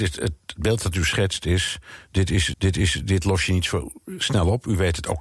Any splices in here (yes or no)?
yes